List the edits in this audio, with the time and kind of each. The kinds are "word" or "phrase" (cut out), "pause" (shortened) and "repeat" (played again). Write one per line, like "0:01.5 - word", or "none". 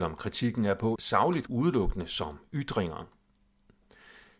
0:01.0 - word
0:01.5 - phrase